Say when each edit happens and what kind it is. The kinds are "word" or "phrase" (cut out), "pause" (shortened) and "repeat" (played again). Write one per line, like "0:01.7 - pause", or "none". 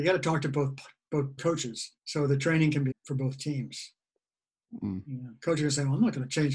0:01.4 - phrase
0:02.0 - pause
0:02.9 - phrase